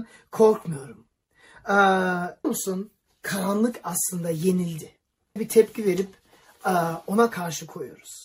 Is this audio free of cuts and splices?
no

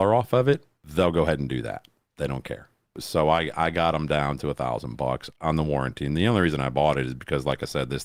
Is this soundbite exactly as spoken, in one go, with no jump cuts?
yes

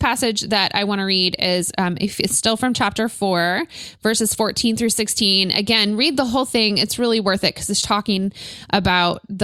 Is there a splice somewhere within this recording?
yes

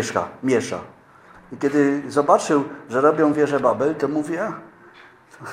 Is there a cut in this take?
no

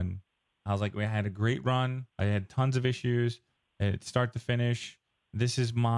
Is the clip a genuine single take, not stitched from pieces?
no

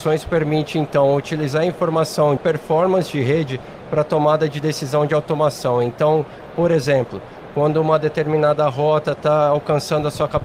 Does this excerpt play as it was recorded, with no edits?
no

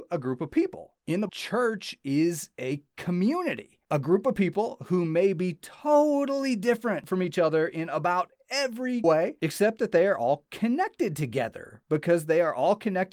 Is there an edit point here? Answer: yes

